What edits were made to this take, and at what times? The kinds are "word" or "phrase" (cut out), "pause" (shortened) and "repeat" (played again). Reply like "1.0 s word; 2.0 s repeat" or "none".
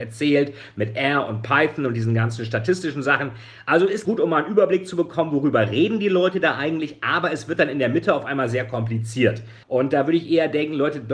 4.0 s word; 9.6 s pause